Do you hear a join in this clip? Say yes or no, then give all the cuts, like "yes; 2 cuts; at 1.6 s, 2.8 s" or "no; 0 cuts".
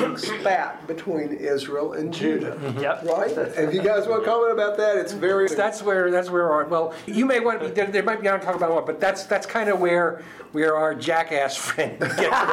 yes; 2 cuts; at 5.5 s, 7.1 s